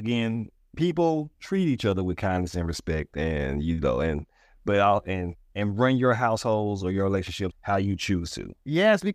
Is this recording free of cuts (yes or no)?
no